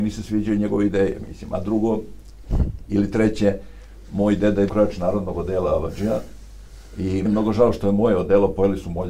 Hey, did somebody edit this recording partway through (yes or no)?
yes